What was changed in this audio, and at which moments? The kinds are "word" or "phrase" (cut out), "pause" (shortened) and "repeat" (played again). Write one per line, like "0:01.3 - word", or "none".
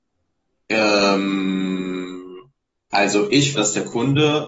0:03.5 - word